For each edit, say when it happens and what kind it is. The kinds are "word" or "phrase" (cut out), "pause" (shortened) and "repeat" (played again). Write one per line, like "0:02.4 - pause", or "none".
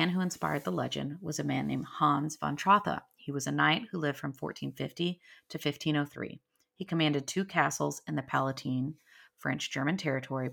none